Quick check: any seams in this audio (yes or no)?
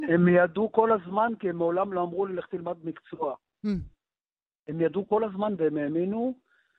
no